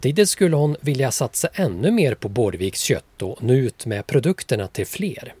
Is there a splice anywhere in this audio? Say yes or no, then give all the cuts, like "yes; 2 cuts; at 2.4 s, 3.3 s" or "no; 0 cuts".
no; 0 cuts